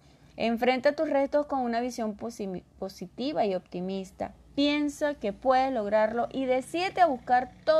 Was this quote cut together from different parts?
no; 0 cuts

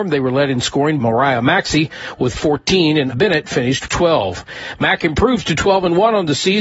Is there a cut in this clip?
yes; 3 cuts; at 1.0 s, 3.1 s, 3.9 s

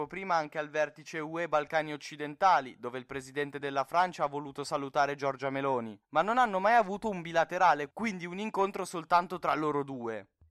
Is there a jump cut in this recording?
no; 0 cuts

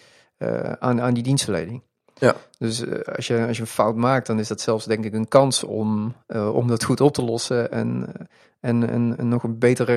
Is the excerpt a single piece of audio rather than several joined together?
yes; 0 cuts

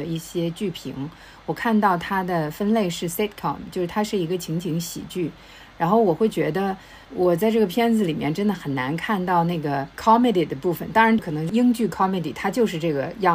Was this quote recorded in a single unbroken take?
yes; 0 cuts

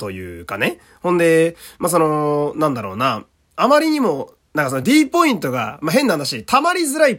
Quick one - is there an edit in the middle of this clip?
no; 0 cuts

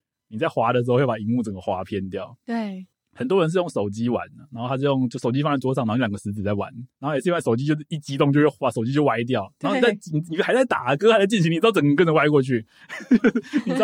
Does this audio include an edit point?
yes; 2 cuts; at 2.9 s, 6.9 s

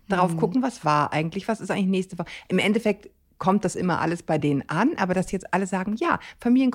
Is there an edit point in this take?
no; 0 cuts

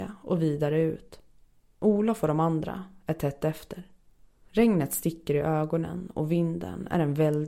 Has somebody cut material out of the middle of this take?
no; 0 cuts

